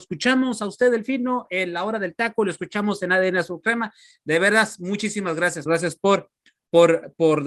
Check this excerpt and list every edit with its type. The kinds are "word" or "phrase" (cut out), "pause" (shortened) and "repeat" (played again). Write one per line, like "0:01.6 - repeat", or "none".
0:05.7 - word